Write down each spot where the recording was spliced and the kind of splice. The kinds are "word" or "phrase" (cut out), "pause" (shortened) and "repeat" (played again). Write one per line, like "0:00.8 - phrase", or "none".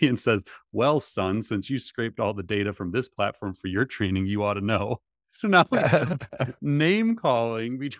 none